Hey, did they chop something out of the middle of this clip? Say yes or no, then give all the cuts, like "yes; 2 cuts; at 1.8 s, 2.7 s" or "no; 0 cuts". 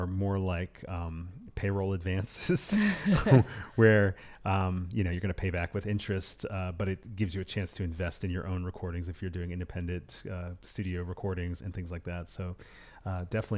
yes; 1 cut; at 11.6 s